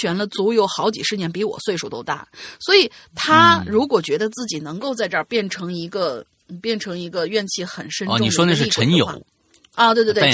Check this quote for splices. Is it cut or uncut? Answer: uncut